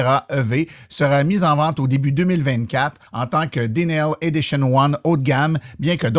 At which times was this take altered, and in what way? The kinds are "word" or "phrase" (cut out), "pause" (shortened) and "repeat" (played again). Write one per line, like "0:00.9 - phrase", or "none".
0:03.1 - pause

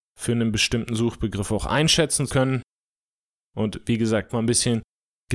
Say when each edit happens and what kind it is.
0:02.3 - word
0:04.3 - phrase

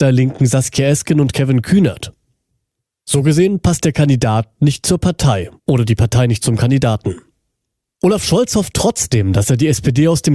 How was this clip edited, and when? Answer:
0:05.6 - pause

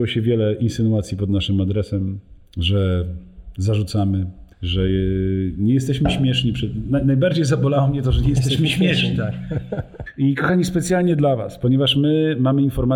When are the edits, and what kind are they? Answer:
0:04.5 - pause

